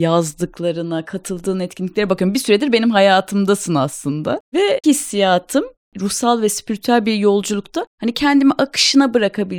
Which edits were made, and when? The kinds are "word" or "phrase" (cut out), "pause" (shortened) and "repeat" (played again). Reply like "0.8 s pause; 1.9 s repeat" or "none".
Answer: 4.8 s word